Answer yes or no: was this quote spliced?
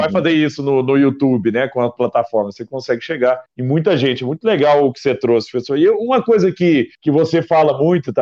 yes